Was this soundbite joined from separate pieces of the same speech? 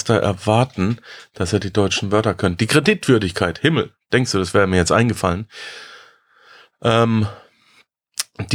no; 0 cuts

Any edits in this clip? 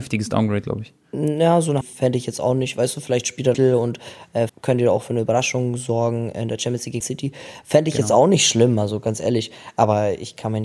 yes; 4 cuts; at 1.8 s, 3.5 s, 4.5 s, 7.0 s

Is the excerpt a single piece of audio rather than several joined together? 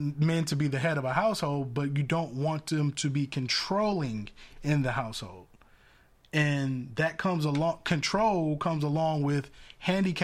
yes; 0 cuts

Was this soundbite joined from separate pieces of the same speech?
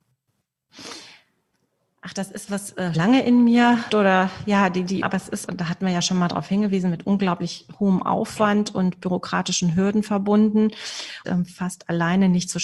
yes; 6 cuts; at 2.5 s, 2.9 s, 3.9 s, 5.0 s, 5.5 s, 11.2 s

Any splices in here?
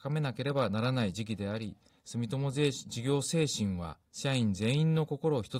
yes; 1 cut; at 4.1 s

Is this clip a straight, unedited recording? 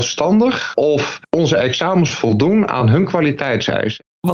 yes; 0 cuts

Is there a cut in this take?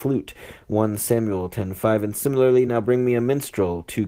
no; 0 cuts

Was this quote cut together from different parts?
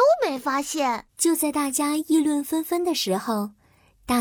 yes; 1 cut; at 1.1 s

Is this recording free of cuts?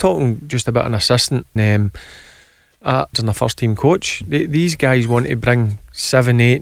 no; 2 cuts; at 1.6 s, 3.1 s

